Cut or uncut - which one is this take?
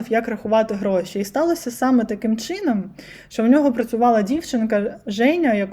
uncut